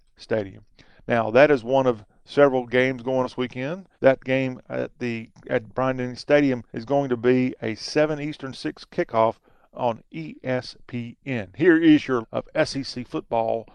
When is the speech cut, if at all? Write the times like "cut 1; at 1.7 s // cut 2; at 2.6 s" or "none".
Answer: cut 1; at 3.2 s // cut 2; at 3.9 s // cut 3; at 6.7 s // cut 4; at 12.2 s